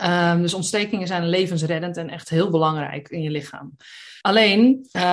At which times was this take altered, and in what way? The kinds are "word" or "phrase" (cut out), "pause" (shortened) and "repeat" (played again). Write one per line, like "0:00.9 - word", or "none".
0:04.2 - pause